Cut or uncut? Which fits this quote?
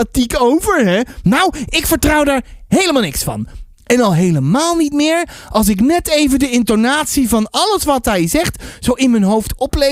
uncut